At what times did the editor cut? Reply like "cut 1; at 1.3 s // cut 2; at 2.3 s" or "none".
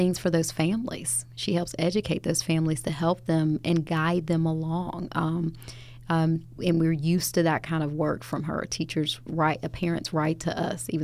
cut 1; at 6.6 s